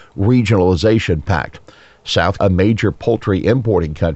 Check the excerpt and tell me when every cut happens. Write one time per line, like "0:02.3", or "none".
0:02.4